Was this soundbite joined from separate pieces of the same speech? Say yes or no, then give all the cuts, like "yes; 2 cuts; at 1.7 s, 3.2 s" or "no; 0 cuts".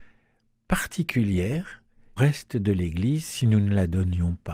yes; 1 cut; at 2.2 s